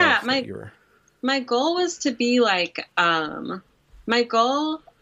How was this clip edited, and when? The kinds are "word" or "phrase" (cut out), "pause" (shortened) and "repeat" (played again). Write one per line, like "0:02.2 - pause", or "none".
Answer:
none